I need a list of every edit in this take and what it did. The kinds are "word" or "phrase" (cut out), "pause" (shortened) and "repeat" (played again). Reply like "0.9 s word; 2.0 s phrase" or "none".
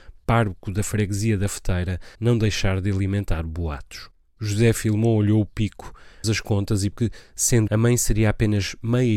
2.1 s pause; 4.3 s pause; 6.2 s word; 6.9 s word; 7.7 s word

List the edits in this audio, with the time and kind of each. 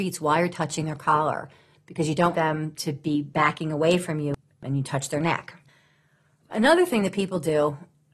2.3 s word

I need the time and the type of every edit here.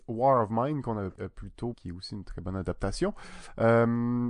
1.1 s word; 1.7 s word

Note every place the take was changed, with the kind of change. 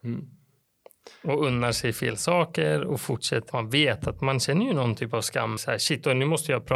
3.5 s word; 5.6 s word

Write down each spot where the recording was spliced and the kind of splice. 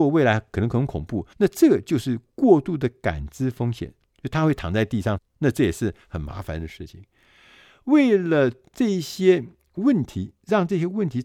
1.3 s pause; 5.2 s phrase

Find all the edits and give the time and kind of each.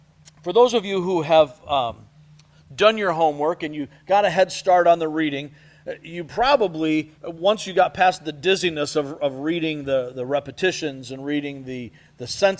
7.1 s pause

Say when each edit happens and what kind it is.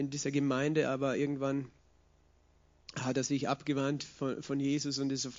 none

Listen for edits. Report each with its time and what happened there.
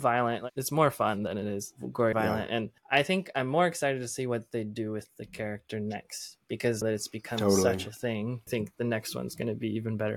2.1 s word; 2.8 s pause; 6.8 s word; 8.5 s word

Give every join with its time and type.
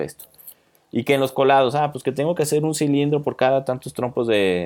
none

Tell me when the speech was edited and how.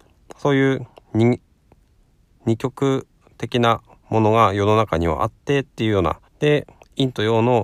6.3 s pause

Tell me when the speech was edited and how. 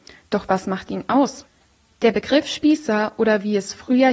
none

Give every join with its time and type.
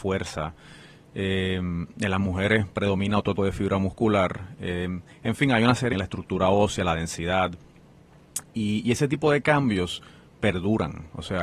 3.4 s word; 5.9 s phrase

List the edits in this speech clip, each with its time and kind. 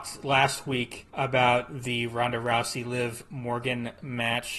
1.1 s pause

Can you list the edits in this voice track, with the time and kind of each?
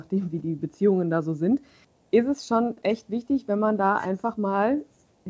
none

